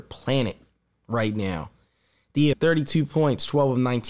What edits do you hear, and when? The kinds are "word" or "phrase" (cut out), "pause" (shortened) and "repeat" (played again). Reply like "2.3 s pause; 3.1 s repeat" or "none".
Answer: 2.5 s word